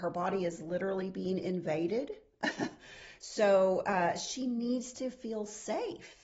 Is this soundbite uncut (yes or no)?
yes